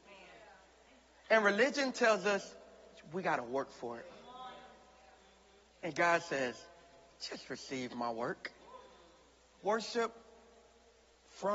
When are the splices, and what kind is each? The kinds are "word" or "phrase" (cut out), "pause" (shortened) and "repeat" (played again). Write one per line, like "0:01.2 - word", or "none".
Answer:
none